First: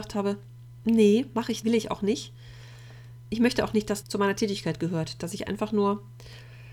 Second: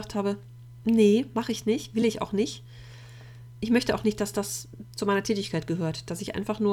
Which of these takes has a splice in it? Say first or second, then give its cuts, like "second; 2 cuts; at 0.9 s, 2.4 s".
first; 2 cuts; at 1.6 s, 4.0 s